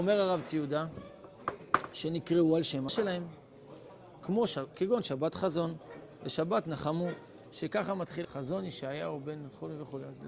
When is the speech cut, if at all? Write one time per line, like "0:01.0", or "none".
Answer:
0:02.9
0:08.2